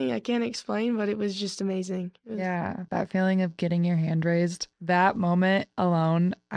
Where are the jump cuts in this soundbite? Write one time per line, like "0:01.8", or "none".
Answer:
0:04.7

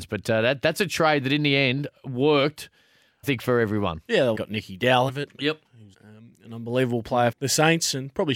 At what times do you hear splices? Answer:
0:03.2
0:04.4
0:05.1
0:05.9
0:07.3

